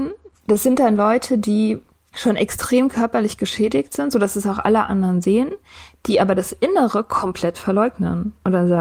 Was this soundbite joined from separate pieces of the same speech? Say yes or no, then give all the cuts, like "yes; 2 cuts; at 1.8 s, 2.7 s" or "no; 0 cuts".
no; 0 cuts